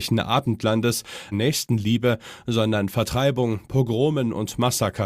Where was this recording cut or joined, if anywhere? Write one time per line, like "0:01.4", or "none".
0:01.3
0:02.9